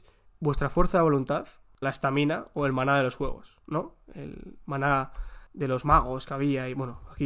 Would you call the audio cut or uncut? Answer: cut